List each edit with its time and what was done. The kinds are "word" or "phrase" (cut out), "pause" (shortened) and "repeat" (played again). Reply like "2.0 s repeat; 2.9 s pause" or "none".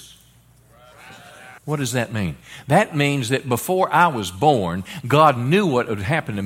1.6 s pause